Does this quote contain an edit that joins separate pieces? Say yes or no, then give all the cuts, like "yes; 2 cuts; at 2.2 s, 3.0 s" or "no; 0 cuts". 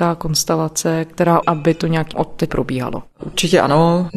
yes; 3 cuts; at 1.4 s, 2.1 s, 2.5 s